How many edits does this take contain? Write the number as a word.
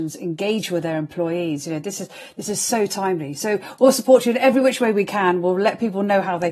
zero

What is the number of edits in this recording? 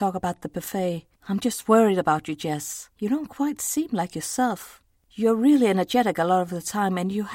three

